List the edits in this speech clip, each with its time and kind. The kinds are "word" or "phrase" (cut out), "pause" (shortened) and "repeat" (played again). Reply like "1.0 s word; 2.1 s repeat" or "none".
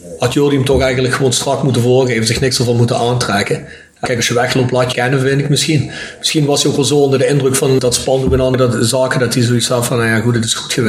4.9 s phrase